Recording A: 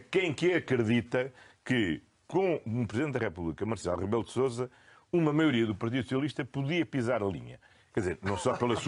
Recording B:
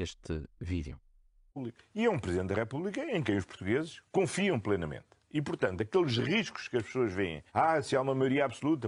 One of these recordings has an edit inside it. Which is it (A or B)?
B